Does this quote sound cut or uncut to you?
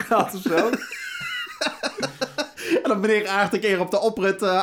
uncut